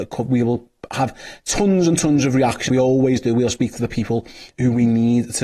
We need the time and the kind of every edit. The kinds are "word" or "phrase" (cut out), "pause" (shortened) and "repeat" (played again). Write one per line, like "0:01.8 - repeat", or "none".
0:02.7 - word